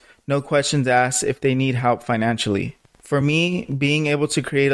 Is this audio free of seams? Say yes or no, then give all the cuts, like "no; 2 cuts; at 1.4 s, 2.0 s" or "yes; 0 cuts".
yes; 0 cuts